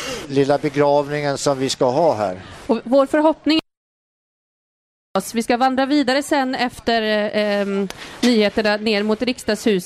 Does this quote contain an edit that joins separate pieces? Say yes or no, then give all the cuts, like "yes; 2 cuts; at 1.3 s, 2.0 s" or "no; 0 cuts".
no; 0 cuts